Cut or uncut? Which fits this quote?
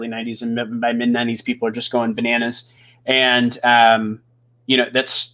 uncut